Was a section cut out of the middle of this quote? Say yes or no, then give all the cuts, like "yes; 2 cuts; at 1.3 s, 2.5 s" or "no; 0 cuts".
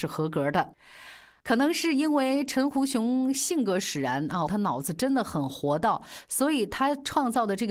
yes; 1 cut; at 4.5 s